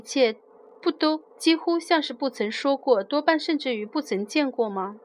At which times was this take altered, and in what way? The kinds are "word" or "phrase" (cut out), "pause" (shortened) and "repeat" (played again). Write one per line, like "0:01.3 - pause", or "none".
0:01.3 - pause